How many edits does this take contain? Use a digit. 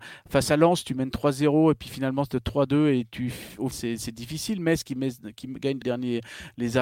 2